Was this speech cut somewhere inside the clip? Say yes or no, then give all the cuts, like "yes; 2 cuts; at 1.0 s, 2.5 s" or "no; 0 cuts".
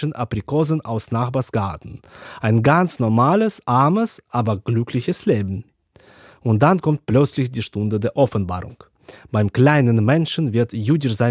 no; 0 cuts